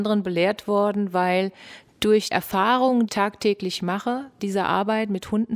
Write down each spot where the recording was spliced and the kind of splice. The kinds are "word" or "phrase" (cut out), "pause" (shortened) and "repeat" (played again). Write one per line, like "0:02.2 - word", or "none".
0:02.3 - word
0:03.1 - word
0:04.4 - word